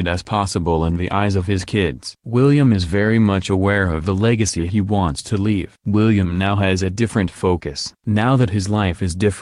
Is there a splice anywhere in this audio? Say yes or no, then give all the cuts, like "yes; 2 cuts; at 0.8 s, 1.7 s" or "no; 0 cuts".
no; 0 cuts